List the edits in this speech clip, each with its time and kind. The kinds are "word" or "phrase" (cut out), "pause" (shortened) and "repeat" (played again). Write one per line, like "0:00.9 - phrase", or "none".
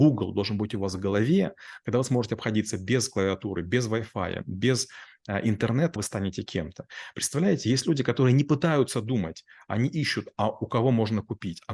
0:06.0 - phrase